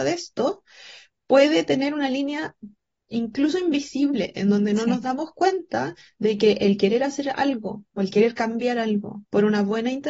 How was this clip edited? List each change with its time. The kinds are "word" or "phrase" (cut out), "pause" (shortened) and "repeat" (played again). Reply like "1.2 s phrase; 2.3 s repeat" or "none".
none